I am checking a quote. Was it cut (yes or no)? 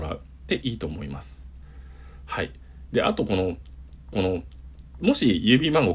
yes